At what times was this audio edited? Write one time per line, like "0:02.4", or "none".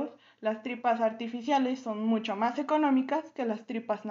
none